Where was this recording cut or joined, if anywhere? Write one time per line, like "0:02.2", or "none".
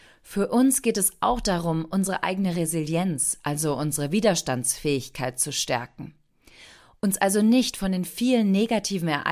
none